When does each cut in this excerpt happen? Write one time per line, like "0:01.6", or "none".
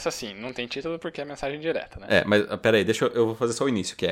none